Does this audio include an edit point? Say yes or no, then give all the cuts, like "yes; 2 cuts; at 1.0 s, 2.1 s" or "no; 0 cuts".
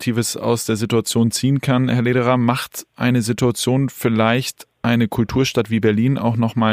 yes; 1 cut; at 2.9 s